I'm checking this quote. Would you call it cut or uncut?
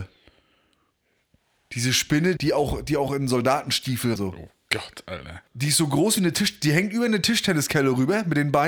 cut